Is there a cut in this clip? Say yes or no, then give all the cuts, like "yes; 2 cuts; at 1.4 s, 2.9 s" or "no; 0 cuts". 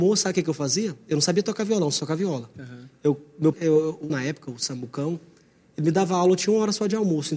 yes; 3 cuts; at 2.0 s, 3.5 s, 4.1 s